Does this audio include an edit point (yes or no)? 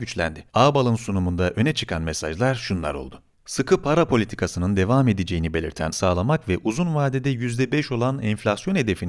yes